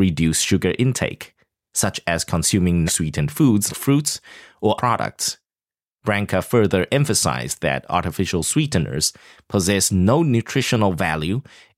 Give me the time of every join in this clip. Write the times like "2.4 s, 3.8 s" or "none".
2.9 s, 3.7 s, 4.8 s